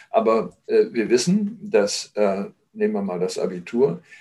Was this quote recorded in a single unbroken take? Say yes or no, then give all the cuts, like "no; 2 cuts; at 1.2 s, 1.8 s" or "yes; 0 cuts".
yes; 0 cuts